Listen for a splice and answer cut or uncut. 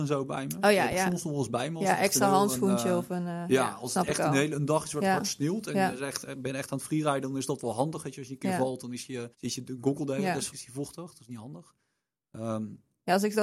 cut